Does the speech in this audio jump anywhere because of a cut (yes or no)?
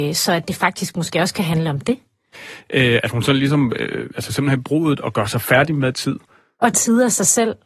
yes